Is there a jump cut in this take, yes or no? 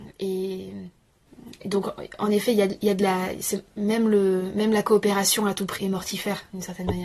yes